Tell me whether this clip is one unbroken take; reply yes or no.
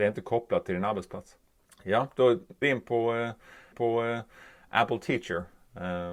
no